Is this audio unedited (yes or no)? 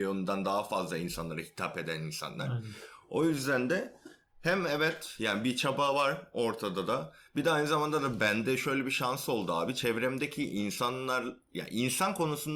yes